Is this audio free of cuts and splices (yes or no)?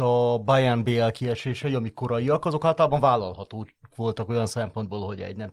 yes